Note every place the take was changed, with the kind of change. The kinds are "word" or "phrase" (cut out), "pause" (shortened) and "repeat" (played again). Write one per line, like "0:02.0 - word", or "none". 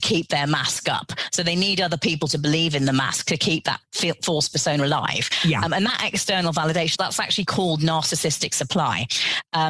0:07.0 - word